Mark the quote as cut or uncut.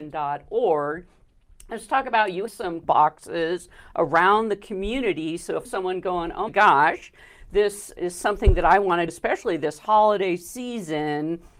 cut